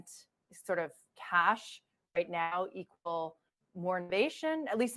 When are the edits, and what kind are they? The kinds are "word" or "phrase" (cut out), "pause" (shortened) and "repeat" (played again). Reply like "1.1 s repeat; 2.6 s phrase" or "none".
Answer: none